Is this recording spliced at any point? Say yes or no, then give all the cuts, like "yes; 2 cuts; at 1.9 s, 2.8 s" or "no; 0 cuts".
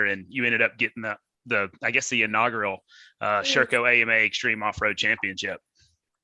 no; 0 cuts